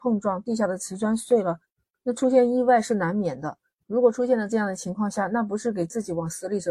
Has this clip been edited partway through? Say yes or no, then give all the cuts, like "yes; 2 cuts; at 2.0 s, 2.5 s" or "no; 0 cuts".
no; 0 cuts